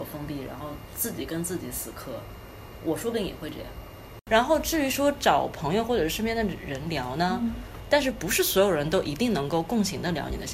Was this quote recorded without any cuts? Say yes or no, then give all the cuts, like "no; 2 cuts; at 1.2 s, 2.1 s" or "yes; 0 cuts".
yes; 0 cuts